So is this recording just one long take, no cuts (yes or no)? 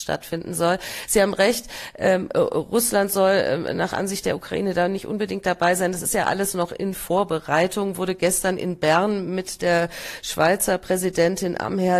yes